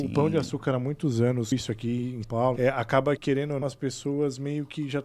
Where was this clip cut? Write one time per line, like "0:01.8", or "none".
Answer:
0:01.5
0:02.2
0:02.6
0:03.2
0:03.6